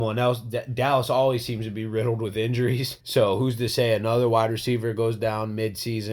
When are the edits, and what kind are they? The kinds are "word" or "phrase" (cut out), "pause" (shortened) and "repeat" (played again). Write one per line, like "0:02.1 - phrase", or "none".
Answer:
0:03.0 - pause